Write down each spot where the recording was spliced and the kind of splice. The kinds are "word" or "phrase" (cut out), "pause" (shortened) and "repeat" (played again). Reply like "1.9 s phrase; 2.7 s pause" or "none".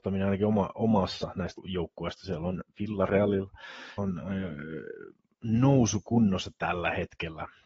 1.6 s word; 4.0 s word